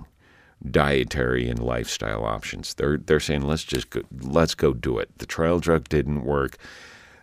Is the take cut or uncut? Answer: uncut